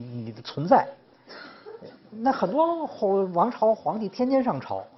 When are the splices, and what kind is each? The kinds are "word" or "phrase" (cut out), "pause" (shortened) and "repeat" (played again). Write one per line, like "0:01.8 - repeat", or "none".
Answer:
none

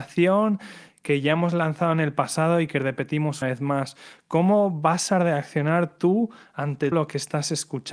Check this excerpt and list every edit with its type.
0:03.4 - word
0:06.9 - word

